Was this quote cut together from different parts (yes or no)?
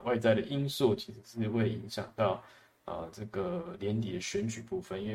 no